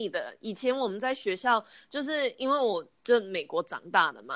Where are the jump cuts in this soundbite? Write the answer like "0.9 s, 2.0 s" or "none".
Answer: none